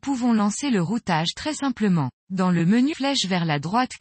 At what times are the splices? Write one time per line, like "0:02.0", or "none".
0:02.2
0:02.9